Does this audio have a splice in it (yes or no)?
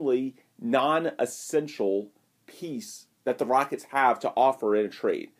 no